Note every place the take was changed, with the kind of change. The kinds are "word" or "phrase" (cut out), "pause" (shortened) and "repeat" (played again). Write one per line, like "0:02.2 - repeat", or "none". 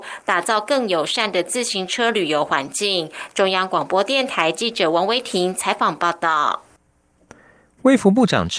none